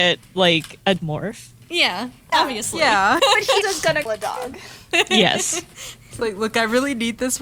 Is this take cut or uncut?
cut